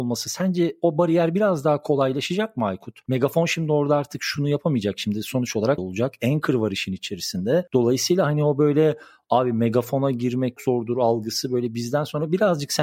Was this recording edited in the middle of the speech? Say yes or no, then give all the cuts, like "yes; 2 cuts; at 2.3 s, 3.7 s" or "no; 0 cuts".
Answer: yes; 2 cuts; at 5.8 s, 10.6 s